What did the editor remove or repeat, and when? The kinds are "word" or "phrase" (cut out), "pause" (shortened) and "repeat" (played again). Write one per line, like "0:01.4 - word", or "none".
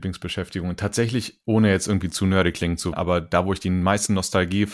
0:01.4 - word
0:02.9 - word